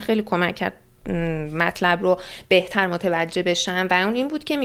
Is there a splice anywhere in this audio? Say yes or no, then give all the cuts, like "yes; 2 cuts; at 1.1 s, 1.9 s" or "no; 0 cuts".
no; 0 cuts